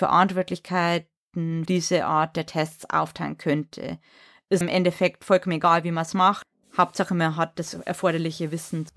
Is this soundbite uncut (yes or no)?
no